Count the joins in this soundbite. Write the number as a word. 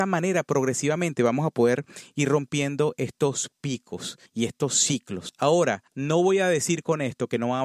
two